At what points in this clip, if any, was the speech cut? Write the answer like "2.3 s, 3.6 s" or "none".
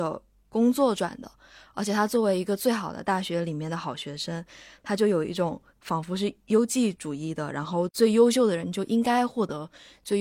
5.7 s